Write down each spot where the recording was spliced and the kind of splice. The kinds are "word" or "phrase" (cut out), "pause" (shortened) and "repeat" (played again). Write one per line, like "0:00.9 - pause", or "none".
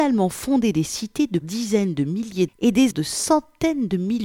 0:01.4 - word
0:02.5 - word
0:02.9 - word